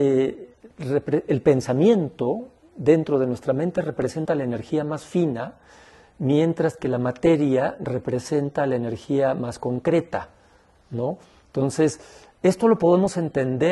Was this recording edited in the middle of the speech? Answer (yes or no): no